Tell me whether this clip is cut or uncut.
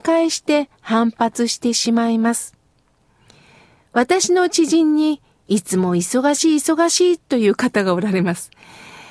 uncut